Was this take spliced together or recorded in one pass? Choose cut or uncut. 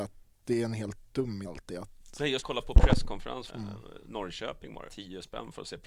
cut